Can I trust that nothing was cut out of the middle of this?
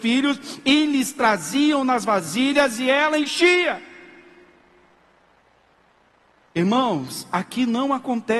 yes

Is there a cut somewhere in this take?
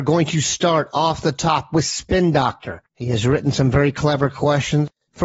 yes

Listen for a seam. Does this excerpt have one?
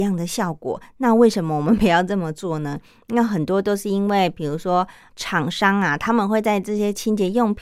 no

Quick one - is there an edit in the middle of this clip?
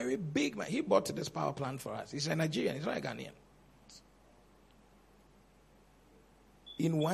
no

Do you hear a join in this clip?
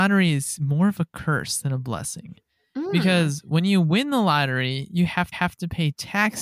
yes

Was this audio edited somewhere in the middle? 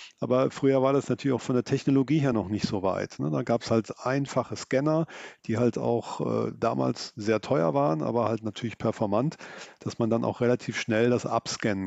no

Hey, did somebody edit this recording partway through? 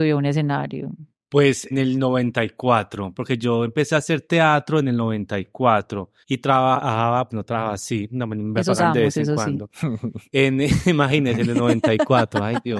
yes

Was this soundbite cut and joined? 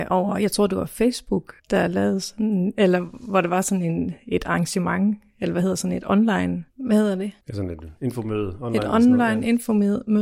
yes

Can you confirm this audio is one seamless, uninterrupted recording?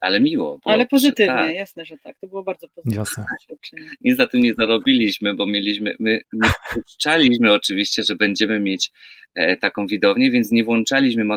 yes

